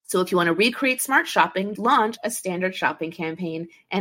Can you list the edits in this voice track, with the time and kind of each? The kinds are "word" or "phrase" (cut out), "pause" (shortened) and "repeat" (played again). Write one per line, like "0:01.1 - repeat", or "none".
0:01.8 - word